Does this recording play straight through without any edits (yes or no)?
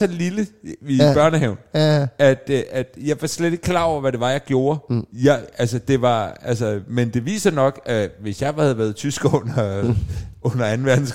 yes